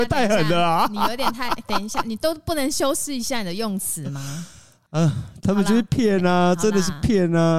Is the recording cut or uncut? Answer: uncut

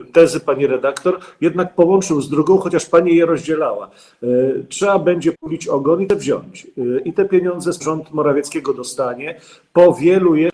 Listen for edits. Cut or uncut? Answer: cut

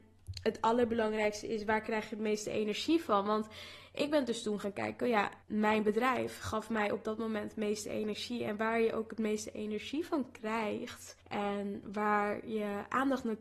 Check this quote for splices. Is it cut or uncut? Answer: cut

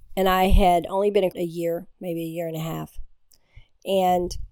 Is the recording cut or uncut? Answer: cut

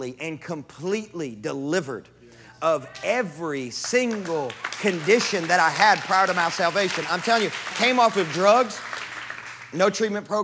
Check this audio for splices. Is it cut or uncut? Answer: cut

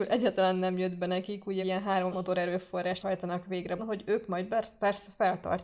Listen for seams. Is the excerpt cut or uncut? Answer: cut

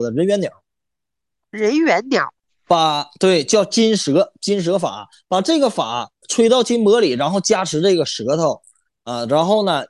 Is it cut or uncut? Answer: uncut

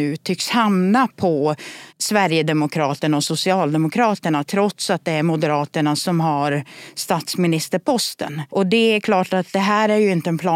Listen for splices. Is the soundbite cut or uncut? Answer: cut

